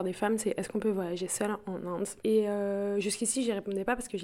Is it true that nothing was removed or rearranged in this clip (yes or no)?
no